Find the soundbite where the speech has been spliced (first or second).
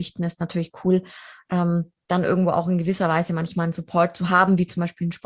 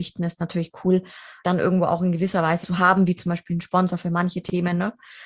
second